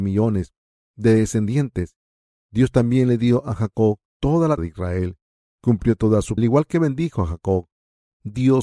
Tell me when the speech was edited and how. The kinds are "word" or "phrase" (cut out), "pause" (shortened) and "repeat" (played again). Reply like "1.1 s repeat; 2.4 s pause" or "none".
4.1 s pause; 4.6 s word; 6.4 s phrase